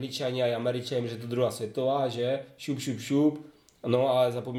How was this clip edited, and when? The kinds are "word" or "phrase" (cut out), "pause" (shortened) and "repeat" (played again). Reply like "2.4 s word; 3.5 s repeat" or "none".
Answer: none

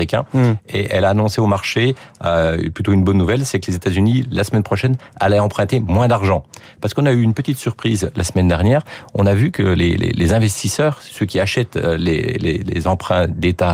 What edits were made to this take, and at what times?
none

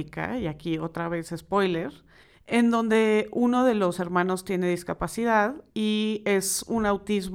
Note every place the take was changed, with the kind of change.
2.2 s pause; 5.7 s pause

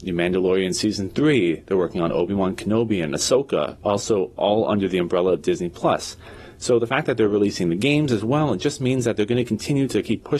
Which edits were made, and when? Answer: none

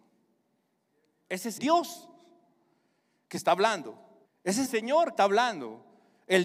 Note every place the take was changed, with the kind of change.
1.6 s word; 4.2 s pause; 4.7 s word; 5.2 s word

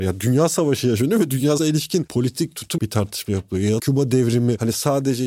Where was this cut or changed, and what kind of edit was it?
1.6 s word; 2.8 s word; 3.8 s word

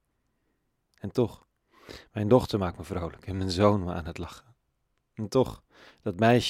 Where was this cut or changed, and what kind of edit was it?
none

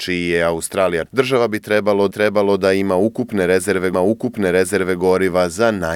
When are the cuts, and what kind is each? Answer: 1.1 s word; 2.1 s repeat; 3.9 s repeat

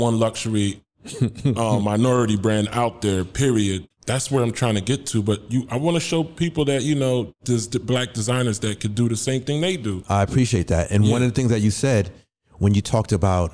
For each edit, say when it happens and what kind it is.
3.9 s word

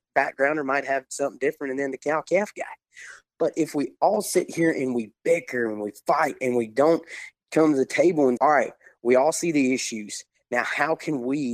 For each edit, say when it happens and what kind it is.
8.4 s word

